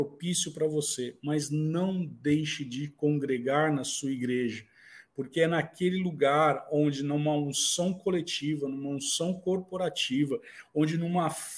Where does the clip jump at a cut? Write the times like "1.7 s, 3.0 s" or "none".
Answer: none